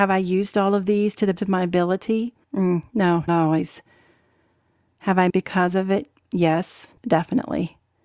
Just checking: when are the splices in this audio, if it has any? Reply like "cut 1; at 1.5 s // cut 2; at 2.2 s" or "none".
cut 1; at 1.4 s // cut 2; at 2.4 s // cut 3; at 3.3 s // cut 4; at 5.3 s // cut 5; at 7.0 s

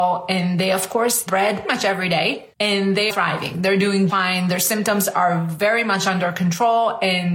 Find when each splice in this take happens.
cut 1; at 1.3 s // cut 2; at 1.6 s // cut 3; at 2.5 s // cut 4; at 3.1 s // cut 5; at 4.1 s

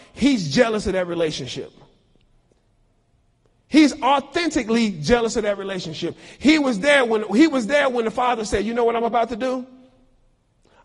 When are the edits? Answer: none

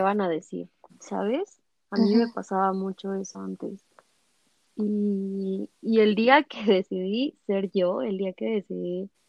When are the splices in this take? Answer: cut 1; at 5.7 s

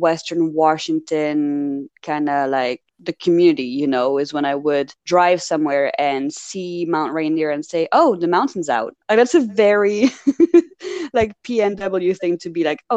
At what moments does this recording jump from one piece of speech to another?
cut 1; at 2.9 s // cut 2; at 5.0 s // cut 3; at 9.0 s

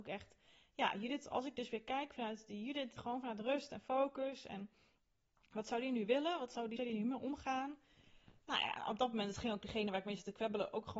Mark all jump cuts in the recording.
cut 1; at 3.0 s // cut 2; at 6.8 s

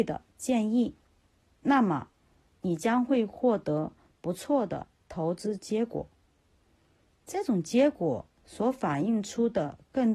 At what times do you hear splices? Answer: none

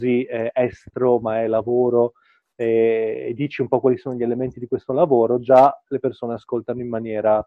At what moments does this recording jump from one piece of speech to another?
none

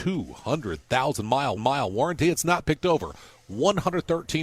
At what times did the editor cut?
cut 1; at 1.6 s

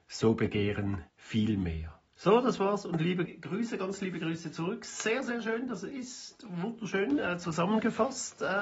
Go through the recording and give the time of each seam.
cut 1; at 1.1 s // cut 2; at 2.1 s // cut 3; at 3.3 s

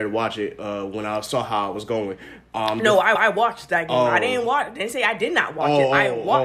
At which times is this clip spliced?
cut 1; at 3.2 s

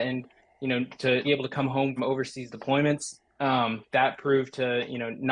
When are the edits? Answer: cut 1; at 1.2 s // cut 2; at 2.0 s

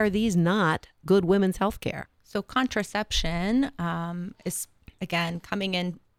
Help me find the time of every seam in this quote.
cut 1; at 2.1 s

